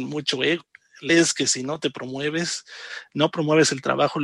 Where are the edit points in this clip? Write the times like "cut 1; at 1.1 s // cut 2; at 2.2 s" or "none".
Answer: cut 1; at 1.1 s